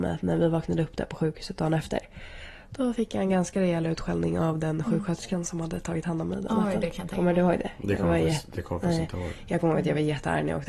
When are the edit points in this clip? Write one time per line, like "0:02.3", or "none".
none

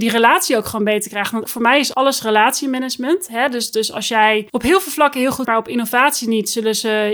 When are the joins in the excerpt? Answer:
0:01.5
0:01.9
0:04.5
0:05.4

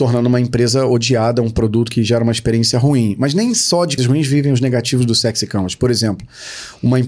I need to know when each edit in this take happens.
0:04.0

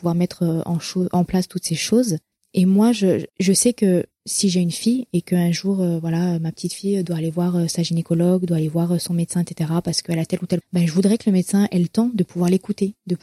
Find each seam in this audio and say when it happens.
0:02.3
0:03.3
0:10.6

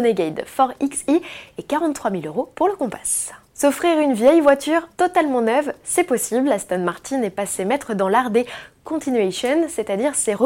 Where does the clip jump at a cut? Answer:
0:02.5
0:03.4
0:04.9

